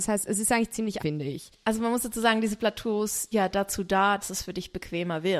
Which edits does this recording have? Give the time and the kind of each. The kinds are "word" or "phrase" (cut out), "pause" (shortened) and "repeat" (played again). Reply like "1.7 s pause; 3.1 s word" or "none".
1.0 s word; 3.3 s word; 4.2 s word